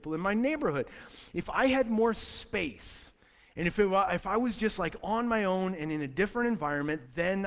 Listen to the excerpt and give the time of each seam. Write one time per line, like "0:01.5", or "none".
none